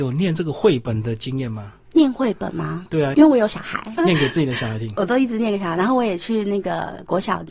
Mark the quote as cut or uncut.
cut